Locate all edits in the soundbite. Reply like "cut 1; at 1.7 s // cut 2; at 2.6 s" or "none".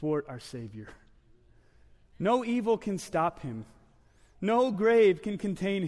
none

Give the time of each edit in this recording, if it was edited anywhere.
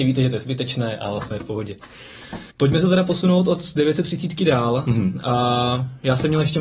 cut 1; at 1.3 s // cut 2; at 2.5 s

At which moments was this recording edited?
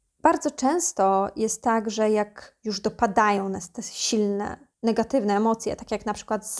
cut 1; at 4.7 s

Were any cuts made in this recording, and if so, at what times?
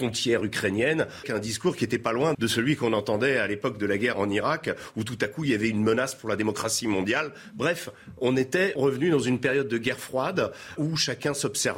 cut 1; at 1.2 s // cut 2; at 2.3 s // cut 3; at 4.1 s // cut 4; at 8.8 s // cut 5; at 10.8 s

